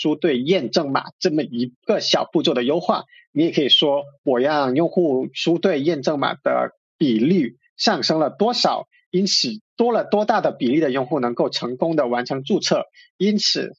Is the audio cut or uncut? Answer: uncut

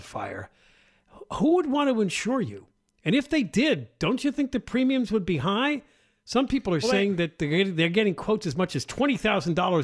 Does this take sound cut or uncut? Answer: uncut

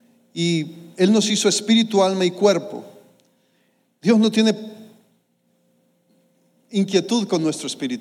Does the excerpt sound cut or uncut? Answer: uncut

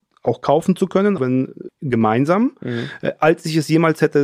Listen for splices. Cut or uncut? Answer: cut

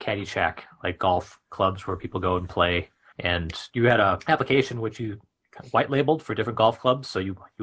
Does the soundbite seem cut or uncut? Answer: uncut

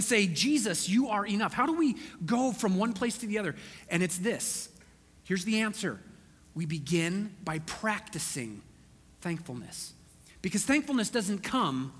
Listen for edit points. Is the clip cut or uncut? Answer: uncut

